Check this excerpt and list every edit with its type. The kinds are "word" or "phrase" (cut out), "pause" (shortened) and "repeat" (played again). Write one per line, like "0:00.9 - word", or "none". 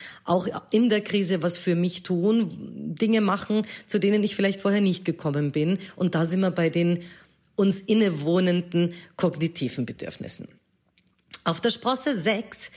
none